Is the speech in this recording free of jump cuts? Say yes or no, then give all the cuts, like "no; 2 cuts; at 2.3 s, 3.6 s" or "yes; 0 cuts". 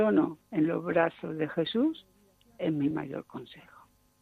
yes; 0 cuts